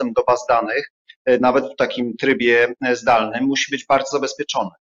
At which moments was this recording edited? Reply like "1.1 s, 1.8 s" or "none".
none